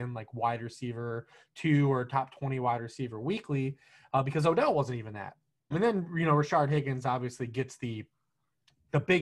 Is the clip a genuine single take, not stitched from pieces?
no; 1 cut; at 5.7 s

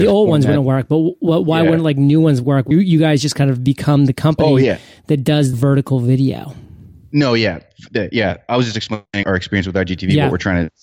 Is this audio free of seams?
no; 3 cuts; at 2.7 s, 5.5 s, 9.2 s

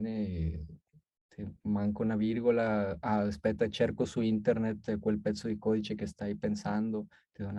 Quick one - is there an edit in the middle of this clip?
no; 0 cuts

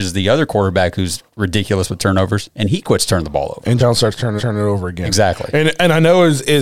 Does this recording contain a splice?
yes; 3 cuts; at 1.3 s, 3.8 s, 4.4 s

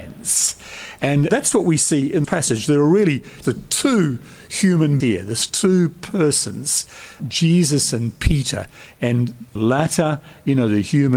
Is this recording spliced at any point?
yes; 6 cuts; at 1.3 s, 2.2 s, 3.4 s, 5.0 s, 7.2 s, 9.6 s

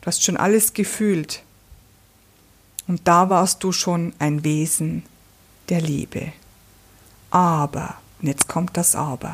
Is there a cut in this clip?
no; 0 cuts

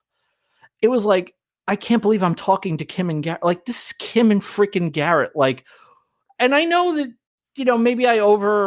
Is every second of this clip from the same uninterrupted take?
yes; 0 cuts

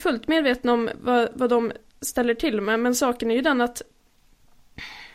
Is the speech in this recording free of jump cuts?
yes; 0 cuts

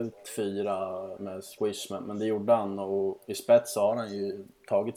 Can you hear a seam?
yes; 2 cuts; at 1.2 s, 1.6 s

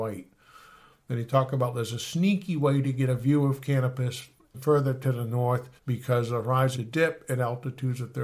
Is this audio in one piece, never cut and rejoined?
no; 3 cuts; at 4.5 s, 5.8 s, 6.7 s

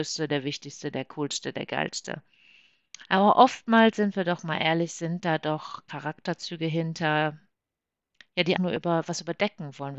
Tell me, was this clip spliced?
yes; 1 cut; at 8.6 s

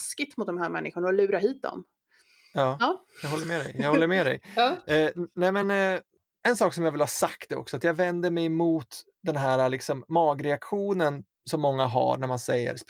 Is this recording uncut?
yes; 0 cuts

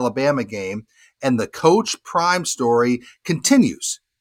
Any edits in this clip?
no; 0 cuts

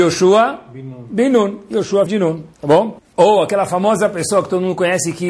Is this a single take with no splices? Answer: no; 2 cuts; at 2.1 s, 2.5 s

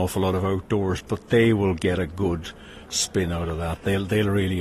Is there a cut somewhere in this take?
no; 0 cuts

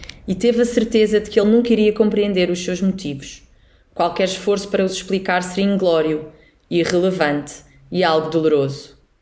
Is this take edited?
no; 0 cuts

